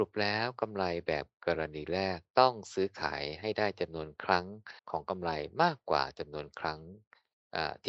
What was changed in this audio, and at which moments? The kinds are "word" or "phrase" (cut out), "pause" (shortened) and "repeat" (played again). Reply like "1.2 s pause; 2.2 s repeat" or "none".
4.8 s pause